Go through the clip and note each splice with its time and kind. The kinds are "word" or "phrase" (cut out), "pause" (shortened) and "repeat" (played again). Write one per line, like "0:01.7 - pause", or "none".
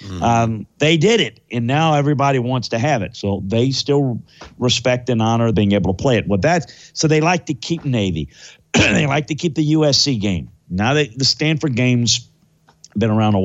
0:05.5 - phrase